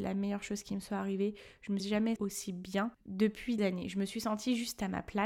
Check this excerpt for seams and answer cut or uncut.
cut